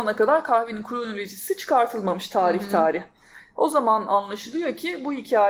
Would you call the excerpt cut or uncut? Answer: uncut